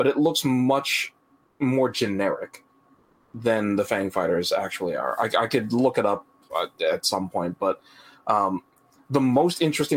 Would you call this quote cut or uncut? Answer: uncut